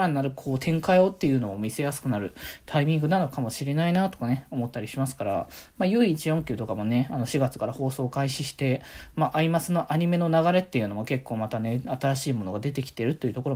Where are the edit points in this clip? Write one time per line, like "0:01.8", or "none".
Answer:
none